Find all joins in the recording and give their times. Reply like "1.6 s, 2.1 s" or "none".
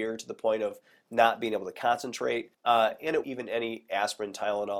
2.5 s, 3.2 s